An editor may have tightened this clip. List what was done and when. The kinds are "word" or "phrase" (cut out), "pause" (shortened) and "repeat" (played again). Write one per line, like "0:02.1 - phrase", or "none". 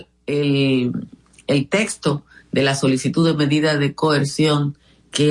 none